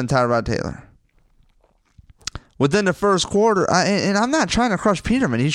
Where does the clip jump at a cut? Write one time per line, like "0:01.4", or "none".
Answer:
none